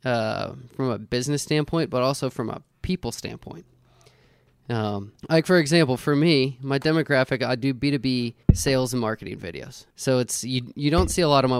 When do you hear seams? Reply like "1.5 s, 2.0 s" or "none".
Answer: 5.2 s, 8.4 s, 9.9 s